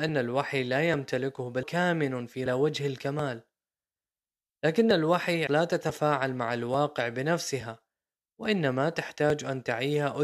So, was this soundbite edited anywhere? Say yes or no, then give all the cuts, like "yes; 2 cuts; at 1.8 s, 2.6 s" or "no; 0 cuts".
yes; 3 cuts; at 1.6 s, 2.5 s, 5.5 s